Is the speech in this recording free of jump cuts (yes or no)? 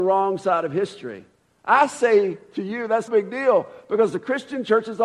no